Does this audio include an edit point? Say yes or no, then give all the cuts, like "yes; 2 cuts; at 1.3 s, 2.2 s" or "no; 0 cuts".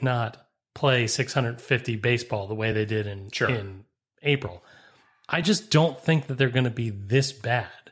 no; 0 cuts